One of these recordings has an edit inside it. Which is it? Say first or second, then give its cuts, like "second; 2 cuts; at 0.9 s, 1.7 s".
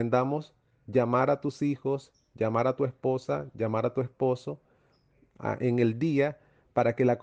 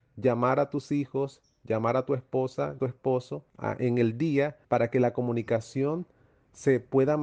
second; 3 cuts; at 2.8 s, 3.5 s, 4.6 s